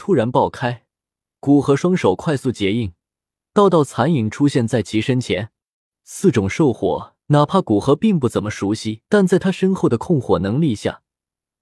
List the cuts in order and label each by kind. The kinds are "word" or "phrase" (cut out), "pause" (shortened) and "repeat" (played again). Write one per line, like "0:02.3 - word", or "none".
0:07.2 - pause
0:09.0 - pause